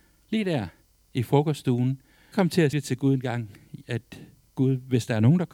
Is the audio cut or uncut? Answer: cut